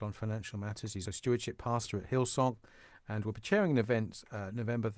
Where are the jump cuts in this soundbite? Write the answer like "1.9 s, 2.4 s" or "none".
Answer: 1.0 s